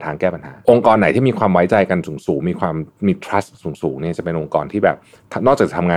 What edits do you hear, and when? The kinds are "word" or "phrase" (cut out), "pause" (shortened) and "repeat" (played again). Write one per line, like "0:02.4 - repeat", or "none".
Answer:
none